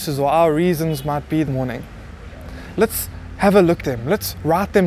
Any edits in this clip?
yes; 3 cuts; at 1.5 s, 2.7 s, 3.8 s

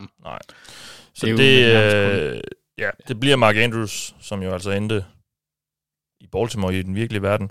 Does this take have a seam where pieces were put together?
no; 0 cuts

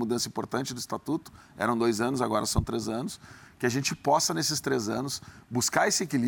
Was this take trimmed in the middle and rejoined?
no; 0 cuts

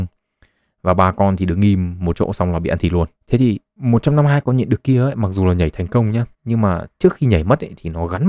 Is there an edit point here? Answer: yes; 2 cuts; at 3.2 s, 6.3 s

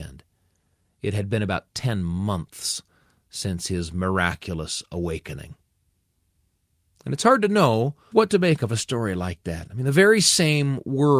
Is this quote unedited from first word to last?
no; 1 cut; at 8.1 s

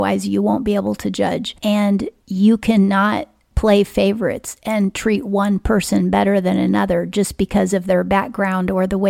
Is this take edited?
no; 0 cuts

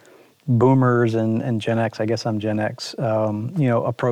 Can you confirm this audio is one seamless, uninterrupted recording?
yes; 0 cuts

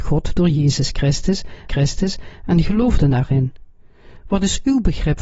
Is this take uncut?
no; 1 cut; at 1.7 s

